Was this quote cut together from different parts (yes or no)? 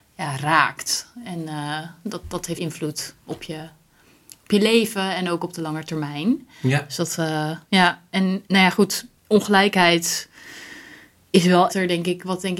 yes